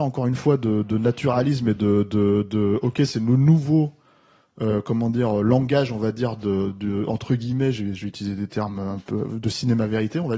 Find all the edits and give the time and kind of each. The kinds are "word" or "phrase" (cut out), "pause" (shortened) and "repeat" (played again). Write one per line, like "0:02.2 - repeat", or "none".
none